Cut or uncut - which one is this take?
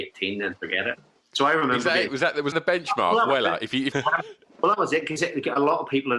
cut